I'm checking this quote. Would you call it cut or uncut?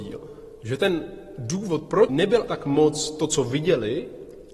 cut